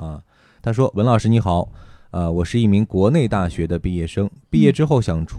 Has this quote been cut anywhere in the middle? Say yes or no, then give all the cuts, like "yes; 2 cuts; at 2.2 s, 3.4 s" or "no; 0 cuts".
no; 0 cuts